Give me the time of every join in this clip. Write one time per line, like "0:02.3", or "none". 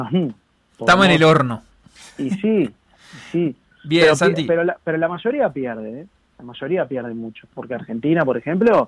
0:06.2

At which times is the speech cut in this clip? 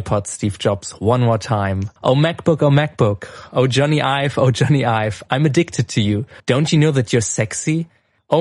0:02.0
0:06.4

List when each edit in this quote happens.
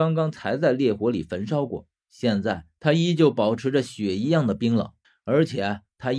0:05.0

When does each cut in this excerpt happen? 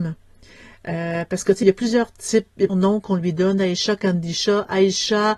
0:01.6
0:02.7

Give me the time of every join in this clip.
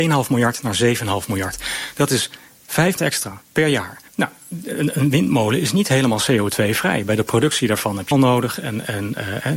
0:03.0
0:04.1
0:08.1

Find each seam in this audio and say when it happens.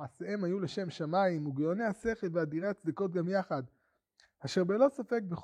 none

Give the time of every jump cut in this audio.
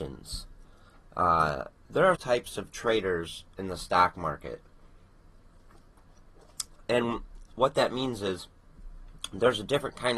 0:01.8
0:02.1

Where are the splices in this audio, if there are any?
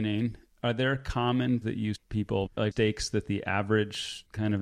0:01.6
0:02.0
0:02.5

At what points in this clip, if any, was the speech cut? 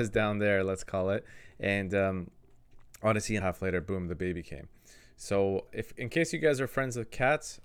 0:03.4
0:05.7

